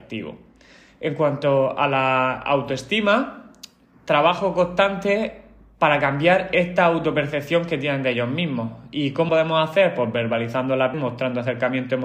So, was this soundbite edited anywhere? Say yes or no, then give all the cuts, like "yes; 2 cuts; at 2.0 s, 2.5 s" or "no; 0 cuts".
yes; 2 cuts; at 9.3 s, 10.9 s